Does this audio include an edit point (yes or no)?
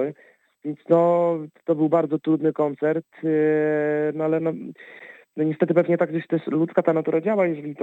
no